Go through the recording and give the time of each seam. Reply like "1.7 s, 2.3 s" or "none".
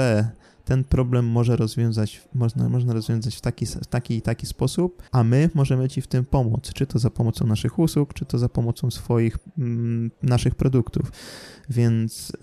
5.1 s